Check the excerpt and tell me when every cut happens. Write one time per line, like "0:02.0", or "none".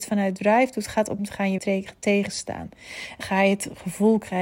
0:01.2
0:01.6
0:03.2